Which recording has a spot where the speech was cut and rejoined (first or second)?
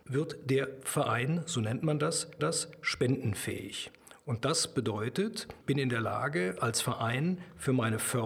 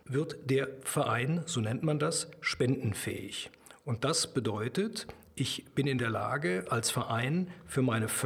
first